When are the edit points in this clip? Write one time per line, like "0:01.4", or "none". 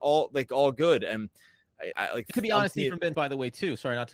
0:01.9
0:02.3
0:03.1